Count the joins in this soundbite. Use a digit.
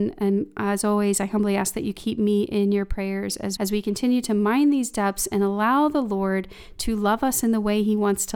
1